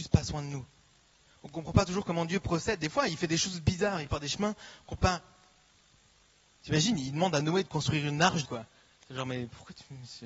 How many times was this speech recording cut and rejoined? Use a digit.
3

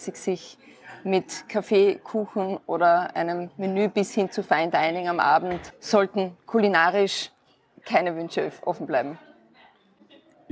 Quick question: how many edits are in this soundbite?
0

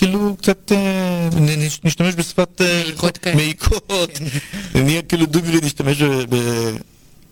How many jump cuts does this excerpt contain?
0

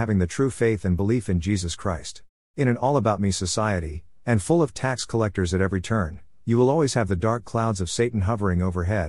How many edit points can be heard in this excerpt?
1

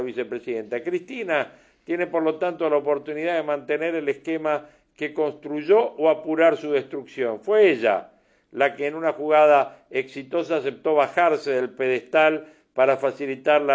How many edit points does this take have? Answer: 0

